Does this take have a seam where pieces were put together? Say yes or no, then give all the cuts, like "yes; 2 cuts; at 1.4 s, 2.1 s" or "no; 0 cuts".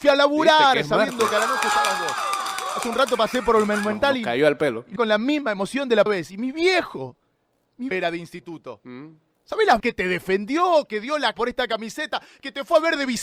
yes; 5 cuts; at 5.0 s, 6.1 s, 7.9 s, 9.8 s, 11.3 s